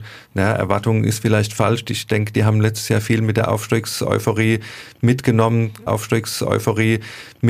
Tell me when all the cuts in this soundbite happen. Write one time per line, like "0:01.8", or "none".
0:05.9